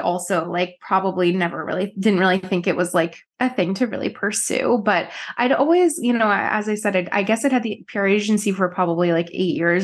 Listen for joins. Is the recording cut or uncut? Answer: cut